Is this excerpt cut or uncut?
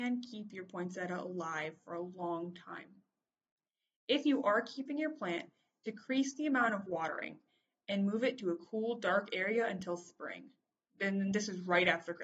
uncut